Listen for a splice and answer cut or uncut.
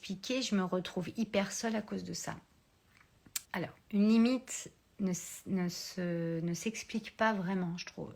cut